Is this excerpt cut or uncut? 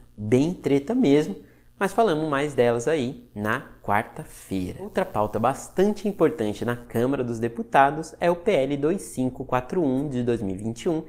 uncut